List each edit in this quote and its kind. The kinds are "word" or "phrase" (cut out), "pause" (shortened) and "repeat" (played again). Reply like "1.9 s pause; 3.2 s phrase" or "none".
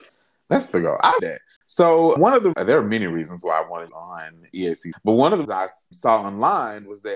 1.2 s word; 2.2 s word; 2.5 s word; 3.9 s word; 4.9 s word; 5.4 s word; 5.9 s word